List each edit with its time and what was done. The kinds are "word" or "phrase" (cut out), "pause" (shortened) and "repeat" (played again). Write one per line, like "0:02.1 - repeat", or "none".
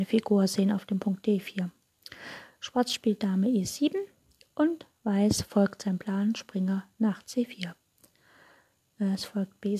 none